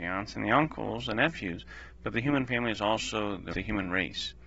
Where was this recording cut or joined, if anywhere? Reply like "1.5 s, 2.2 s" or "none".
3.5 s